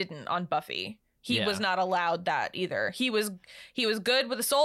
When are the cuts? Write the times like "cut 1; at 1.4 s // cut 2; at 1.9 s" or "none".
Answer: none